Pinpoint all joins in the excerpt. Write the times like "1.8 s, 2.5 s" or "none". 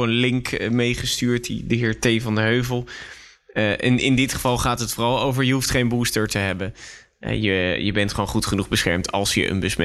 none